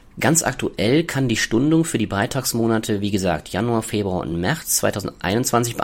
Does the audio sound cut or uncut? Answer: uncut